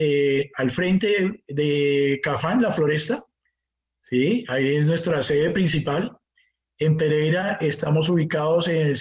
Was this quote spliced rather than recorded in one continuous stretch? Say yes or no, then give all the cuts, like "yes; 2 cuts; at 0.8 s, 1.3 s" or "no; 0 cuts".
no; 0 cuts